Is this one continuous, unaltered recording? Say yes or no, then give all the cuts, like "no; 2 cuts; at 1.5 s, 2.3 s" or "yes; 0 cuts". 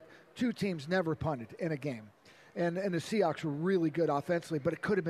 yes; 0 cuts